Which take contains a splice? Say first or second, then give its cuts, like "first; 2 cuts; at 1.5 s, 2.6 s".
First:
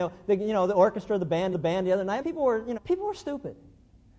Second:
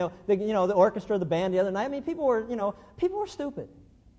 first; 3 cuts; at 1.5 s, 2.2 s, 2.8 s